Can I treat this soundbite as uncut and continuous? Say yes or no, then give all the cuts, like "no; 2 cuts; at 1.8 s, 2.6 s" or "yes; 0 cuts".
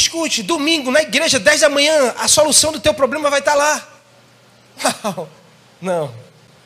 yes; 0 cuts